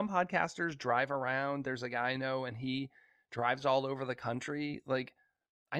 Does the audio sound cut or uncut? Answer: uncut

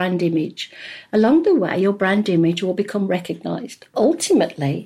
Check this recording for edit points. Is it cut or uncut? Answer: uncut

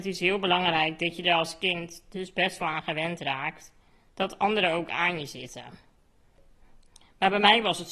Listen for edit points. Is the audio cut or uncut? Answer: uncut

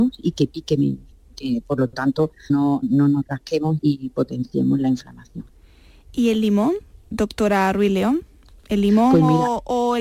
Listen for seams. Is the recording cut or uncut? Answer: cut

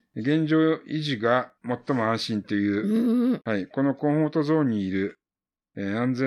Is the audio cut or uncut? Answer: cut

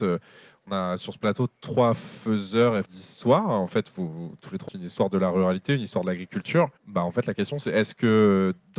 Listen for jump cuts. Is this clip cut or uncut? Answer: cut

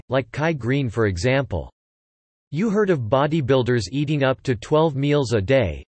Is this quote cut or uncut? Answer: uncut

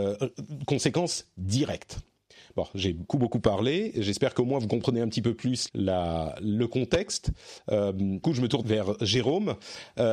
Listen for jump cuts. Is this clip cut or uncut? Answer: cut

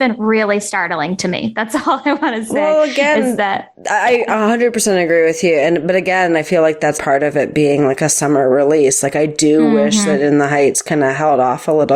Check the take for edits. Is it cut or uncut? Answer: cut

